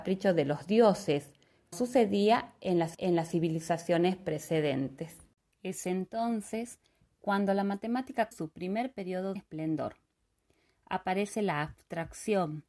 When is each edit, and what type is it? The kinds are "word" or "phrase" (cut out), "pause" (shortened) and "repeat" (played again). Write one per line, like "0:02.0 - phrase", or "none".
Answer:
0:01.7 - word
0:02.9 - repeat
0:05.4 - pause
0:08.3 - word
0:09.4 - phrase